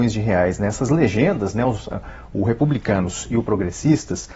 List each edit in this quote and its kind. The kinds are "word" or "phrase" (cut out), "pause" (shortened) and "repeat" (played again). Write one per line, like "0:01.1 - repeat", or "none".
none